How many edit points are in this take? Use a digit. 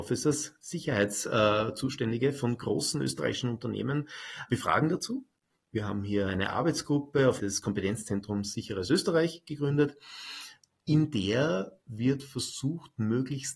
2